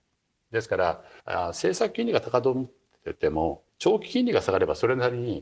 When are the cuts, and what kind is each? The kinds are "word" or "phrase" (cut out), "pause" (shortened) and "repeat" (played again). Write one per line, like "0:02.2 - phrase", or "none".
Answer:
0:01.2 - pause
0:03.7 - pause

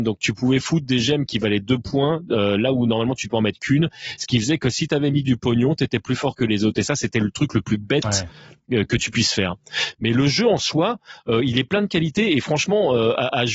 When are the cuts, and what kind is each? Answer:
none

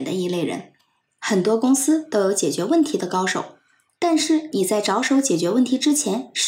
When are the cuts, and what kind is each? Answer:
none

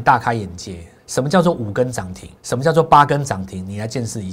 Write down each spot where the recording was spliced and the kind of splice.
0:01.0 - pause
0:02.4 - pause

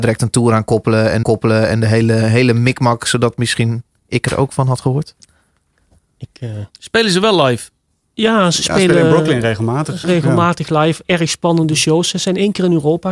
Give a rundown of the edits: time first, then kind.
0:01.2 - repeat
0:06.7 - pause
0:10.0 - word

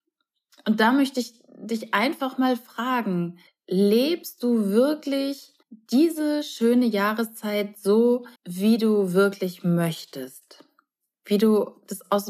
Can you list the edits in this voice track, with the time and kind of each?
0:03.5 - pause
0:05.6 - pause
0:08.4 - pause

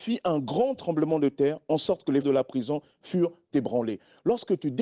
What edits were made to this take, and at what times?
0:02.2 - word

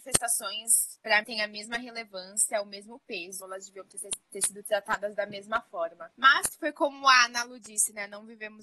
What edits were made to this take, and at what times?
0:01.2 - word
0:03.4 - word
0:06.1 - pause

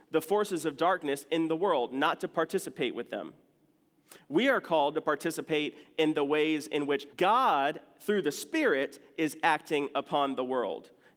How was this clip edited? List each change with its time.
0:07.1 - pause

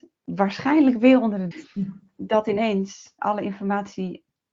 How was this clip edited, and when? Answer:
0:01.5 - word
0:03.2 - word

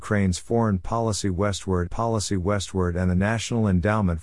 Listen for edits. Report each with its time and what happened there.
0:01.9 - repeat

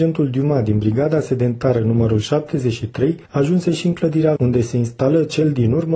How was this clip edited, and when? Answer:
0:03.3 - pause
0:04.4 - word

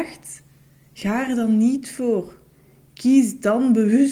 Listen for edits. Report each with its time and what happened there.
none

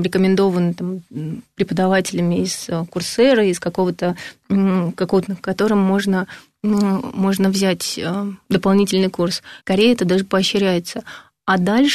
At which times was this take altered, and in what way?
0:05.3 - phrase
0:09.6 - pause

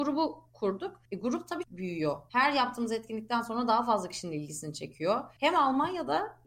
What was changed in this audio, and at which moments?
0:01.6 - phrase

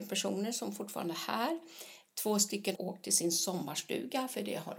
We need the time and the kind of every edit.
0:02.7 - word

